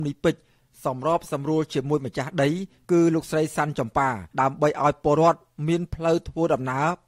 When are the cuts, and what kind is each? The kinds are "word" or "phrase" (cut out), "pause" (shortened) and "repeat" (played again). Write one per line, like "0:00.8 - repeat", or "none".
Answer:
0:04.3 - pause